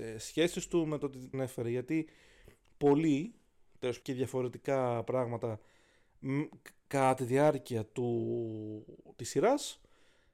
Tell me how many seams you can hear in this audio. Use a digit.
2